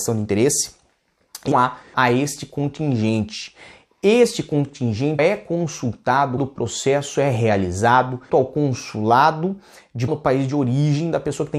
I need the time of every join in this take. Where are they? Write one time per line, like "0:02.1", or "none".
0:01.5
0:01.9
0:05.2
0:06.4
0:08.3
0:10.1

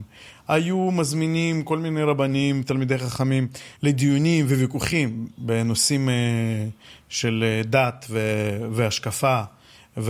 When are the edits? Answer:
none

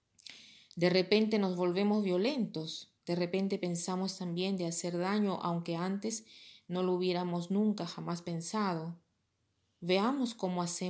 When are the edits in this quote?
0:03.0

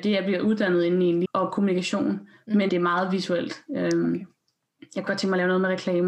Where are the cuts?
0:01.2
0:02.7
0:05.1

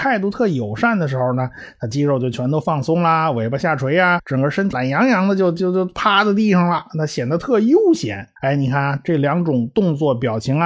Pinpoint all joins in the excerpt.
0:04.2
0:08.4

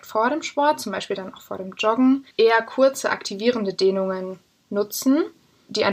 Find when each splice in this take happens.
0:02.3

